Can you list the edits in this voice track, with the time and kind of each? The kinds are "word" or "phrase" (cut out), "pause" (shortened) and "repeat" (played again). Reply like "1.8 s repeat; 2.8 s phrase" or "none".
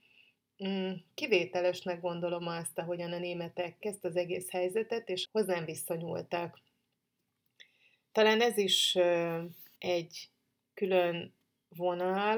3.8 s word; 5.2 s word; 9.8 s pause